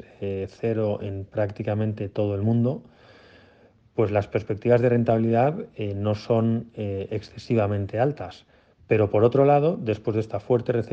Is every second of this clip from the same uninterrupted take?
yes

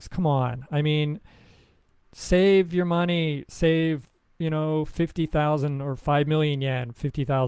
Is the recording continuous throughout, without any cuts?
yes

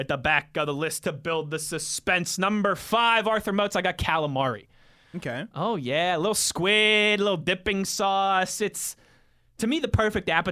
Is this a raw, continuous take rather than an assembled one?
yes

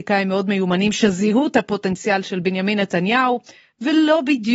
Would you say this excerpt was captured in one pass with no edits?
yes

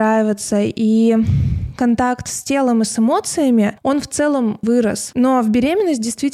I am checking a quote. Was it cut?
yes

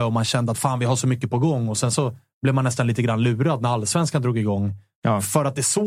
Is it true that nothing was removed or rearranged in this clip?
yes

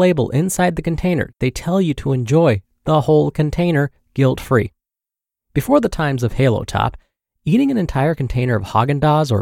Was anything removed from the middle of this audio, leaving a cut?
no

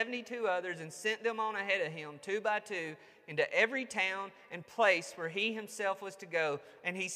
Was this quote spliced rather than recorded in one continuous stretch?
no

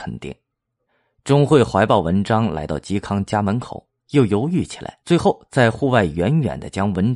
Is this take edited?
yes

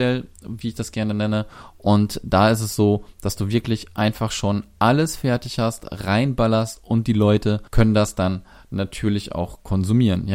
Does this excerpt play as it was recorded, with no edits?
no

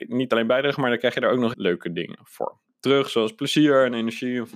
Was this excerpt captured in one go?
no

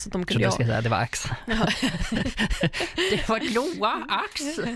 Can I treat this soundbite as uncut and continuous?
no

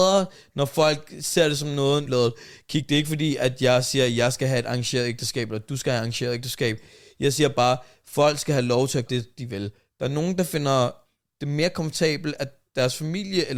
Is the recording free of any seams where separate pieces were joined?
no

